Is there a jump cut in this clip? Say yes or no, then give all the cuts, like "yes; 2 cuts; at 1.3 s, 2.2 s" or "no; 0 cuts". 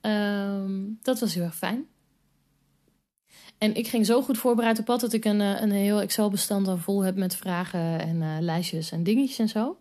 no; 0 cuts